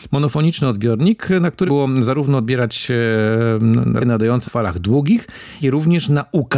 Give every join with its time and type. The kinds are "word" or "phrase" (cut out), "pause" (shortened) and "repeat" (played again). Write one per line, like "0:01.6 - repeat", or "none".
0:01.7 - word
0:04.0 - word
0:04.4 - word
0:05.6 - word